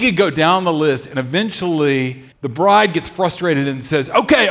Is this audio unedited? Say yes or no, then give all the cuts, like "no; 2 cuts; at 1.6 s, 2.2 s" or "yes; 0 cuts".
no; 1 cut; at 2.3 s